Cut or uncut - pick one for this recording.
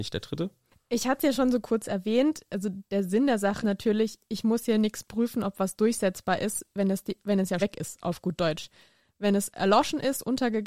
cut